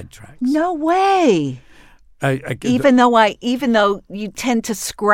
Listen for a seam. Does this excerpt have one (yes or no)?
no